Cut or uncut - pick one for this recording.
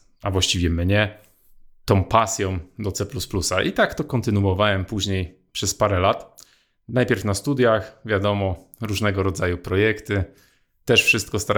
uncut